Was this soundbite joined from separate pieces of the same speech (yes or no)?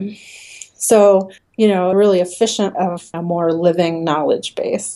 yes